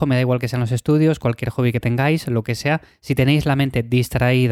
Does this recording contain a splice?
no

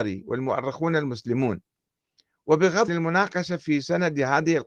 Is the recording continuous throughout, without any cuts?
no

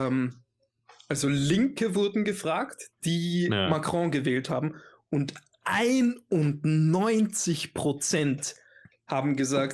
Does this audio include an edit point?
no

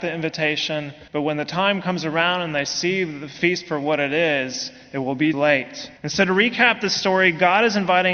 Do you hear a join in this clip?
yes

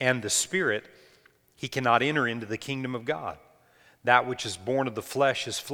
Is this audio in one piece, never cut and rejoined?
yes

